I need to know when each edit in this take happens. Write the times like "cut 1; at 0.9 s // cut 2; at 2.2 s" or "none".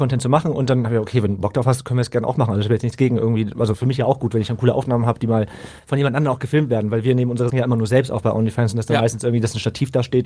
cut 1; at 7.5 s